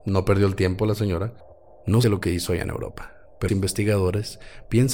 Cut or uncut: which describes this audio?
cut